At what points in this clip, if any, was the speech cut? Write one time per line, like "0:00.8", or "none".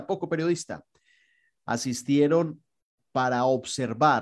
none